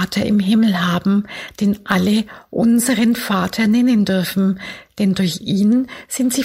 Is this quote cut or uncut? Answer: uncut